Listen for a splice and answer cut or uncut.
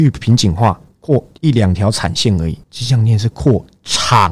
cut